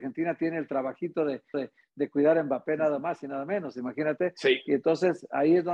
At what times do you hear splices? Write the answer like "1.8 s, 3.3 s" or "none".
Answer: 1.5 s